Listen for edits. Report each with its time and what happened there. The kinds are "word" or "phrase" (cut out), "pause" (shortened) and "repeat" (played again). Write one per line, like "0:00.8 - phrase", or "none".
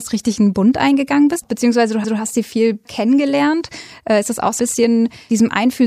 0:02.0 - repeat
0:02.8 - word
0:04.6 - word